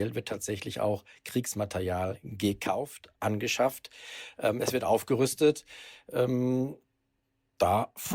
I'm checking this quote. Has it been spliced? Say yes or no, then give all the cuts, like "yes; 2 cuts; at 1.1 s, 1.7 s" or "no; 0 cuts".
no; 0 cuts